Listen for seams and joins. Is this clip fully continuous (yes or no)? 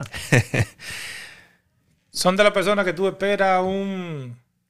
yes